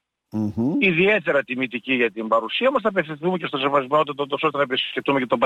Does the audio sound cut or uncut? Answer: uncut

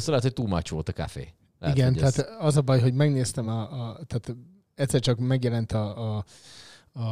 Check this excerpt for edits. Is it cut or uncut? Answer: uncut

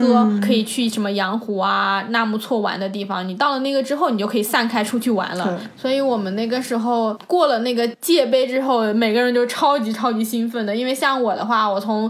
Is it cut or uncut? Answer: cut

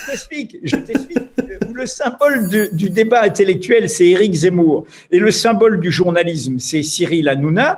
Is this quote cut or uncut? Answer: uncut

